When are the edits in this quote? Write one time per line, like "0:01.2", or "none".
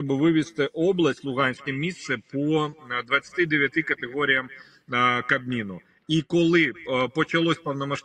0:01.7